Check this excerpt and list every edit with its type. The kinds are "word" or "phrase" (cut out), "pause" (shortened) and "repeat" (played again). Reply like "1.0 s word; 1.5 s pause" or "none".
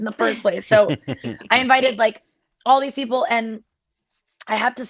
none